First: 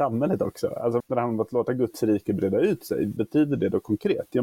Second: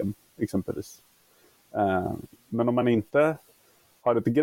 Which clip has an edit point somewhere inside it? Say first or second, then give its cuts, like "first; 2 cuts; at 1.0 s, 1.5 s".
first; 2 cuts; at 1.0 s, 3.2 s